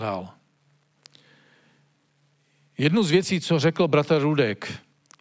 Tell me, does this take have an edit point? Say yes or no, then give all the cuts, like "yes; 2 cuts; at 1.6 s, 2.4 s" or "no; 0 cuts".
no; 0 cuts